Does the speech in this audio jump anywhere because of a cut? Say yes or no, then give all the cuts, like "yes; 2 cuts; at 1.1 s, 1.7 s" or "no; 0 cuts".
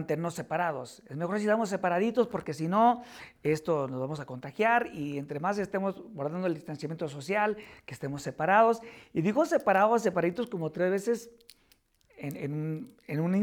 no; 0 cuts